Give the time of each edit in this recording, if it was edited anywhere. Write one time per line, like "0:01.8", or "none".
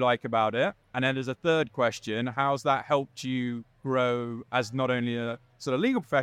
none